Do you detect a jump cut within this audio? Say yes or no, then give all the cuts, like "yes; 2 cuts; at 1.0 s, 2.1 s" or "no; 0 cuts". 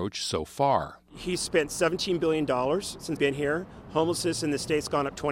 yes; 1 cut; at 3.2 s